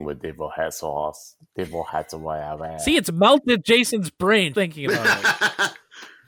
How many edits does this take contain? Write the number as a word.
one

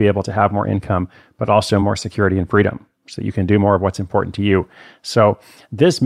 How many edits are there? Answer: zero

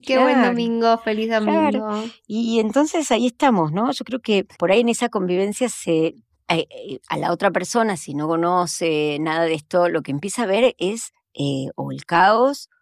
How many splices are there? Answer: three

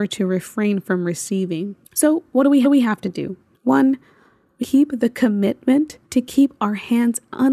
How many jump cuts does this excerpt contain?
five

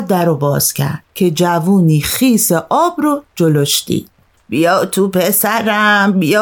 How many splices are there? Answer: two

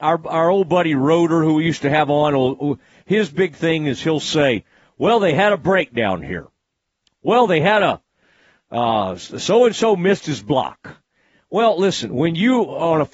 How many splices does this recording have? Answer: zero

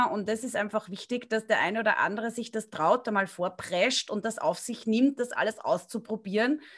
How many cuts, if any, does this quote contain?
zero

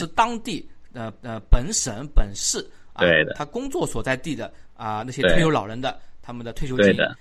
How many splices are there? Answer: one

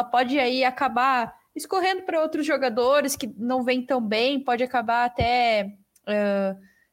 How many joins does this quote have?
zero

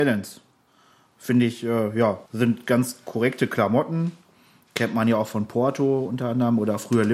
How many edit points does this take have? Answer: one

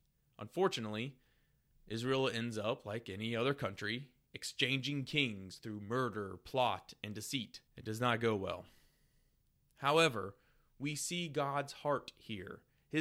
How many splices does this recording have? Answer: one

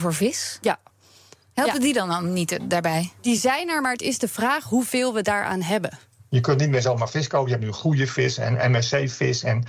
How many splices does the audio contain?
zero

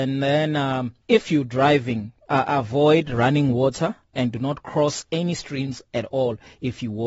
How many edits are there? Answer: one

